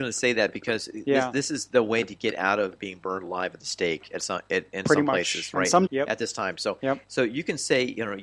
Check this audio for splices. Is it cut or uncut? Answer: cut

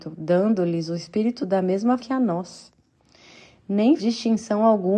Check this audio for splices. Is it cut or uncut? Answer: cut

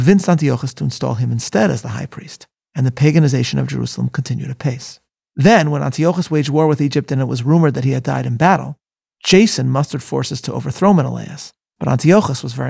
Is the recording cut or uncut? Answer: uncut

